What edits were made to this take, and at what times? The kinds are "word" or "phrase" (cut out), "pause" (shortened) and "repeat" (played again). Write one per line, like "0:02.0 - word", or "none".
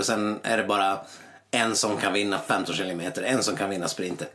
none